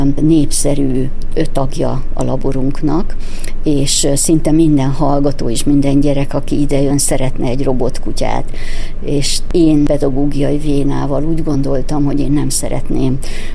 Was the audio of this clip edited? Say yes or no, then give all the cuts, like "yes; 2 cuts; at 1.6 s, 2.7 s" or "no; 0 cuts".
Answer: no; 0 cuts